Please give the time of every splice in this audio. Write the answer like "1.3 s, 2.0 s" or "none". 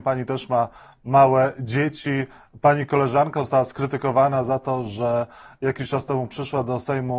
none